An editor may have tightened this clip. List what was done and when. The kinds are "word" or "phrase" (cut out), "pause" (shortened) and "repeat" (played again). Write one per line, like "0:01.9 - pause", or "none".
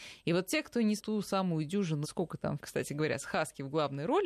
0:01.0 - word
0:02.0 - word
0:02.6 - phrase